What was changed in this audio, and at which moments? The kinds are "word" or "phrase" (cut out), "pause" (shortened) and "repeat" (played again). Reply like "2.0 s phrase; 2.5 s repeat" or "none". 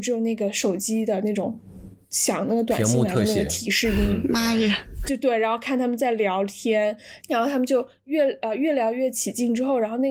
7.2 s phrase